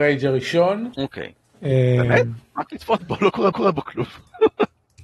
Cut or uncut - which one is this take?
cut